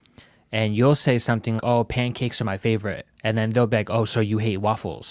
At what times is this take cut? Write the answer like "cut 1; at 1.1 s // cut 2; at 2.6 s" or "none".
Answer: cut 1; at 1.6 s // cut 2; at 3.1 s